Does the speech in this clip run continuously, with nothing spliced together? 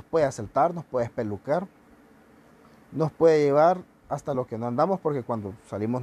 yes; 0 cuts

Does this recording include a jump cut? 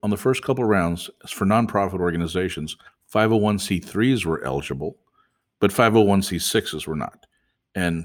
no; 0 cuts

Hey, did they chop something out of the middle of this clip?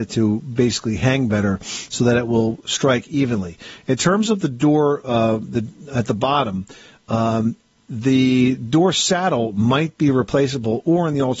no; 0 cuts

